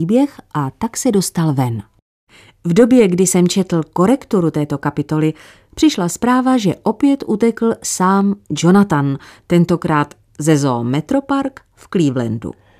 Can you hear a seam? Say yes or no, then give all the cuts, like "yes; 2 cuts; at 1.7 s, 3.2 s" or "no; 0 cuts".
no; 0 cuts